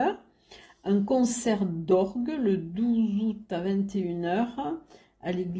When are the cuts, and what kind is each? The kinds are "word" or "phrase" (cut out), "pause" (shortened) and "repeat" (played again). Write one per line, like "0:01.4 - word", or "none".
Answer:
none